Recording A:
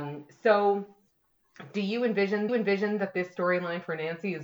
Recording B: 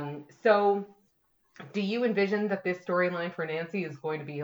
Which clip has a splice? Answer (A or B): A